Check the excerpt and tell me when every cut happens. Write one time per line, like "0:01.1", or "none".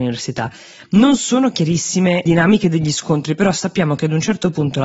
0:02.3